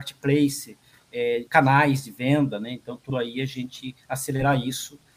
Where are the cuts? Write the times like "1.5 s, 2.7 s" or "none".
1.5 s, 3.1 s